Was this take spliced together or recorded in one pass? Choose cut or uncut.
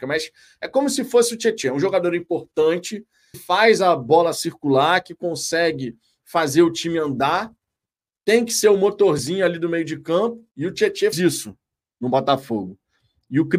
cut